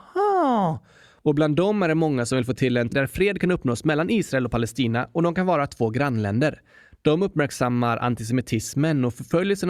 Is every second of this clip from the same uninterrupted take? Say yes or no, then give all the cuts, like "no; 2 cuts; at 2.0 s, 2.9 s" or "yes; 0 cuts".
no; 1 cut; at 2.9 s